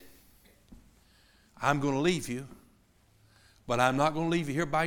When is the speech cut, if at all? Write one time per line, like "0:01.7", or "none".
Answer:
none